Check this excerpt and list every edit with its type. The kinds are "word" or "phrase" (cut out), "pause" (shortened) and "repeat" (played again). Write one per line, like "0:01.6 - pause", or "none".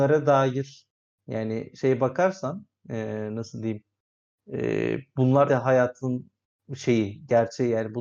0:05.5 - word